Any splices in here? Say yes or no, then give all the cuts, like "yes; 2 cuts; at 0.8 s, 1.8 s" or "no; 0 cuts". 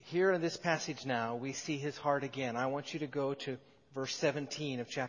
no; 0 cuts